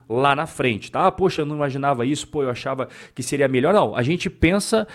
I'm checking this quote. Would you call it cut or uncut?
uncut